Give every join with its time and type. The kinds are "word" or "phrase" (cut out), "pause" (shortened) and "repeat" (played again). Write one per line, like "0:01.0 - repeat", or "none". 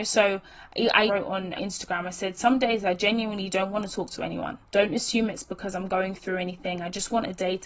0:01.1 - word
0:01.6 - word
0:04.7 - pause